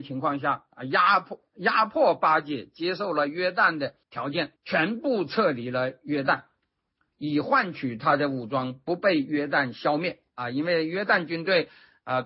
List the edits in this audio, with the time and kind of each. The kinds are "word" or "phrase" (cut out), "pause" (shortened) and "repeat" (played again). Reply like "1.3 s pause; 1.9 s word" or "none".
4.0 s pause; 4.6 s pause